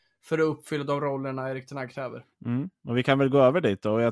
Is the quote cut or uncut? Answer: cut